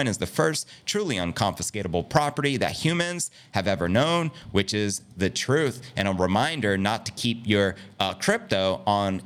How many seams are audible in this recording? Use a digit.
0